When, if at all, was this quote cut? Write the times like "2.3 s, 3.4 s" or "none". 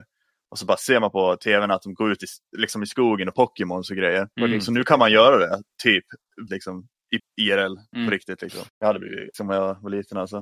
3.3 s, 4.3 s, 6.5 s, 7.2 s, 8.7 s, 9.3 s